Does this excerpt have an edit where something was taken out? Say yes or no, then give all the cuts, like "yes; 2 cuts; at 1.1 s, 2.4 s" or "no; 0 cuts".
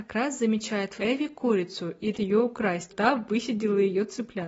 yes; 3 cuts; at 1.0 s, 2.1 s, 2.9 s